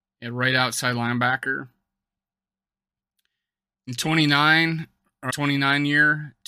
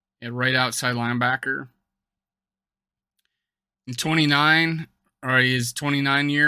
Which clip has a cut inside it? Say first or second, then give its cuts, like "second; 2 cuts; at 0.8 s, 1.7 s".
first; 1 cut; at 5.3 s